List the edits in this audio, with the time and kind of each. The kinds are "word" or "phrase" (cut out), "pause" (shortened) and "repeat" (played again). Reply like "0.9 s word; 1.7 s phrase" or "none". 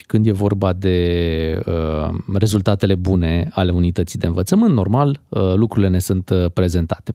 none